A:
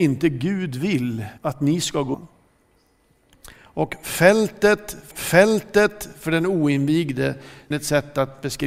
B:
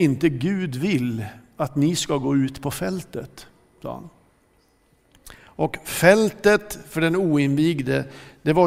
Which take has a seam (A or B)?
A